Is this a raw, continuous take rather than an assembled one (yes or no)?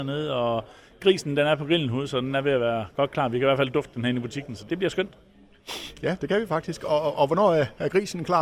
no